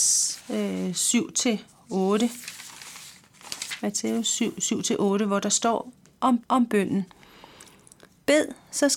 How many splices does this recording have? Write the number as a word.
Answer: one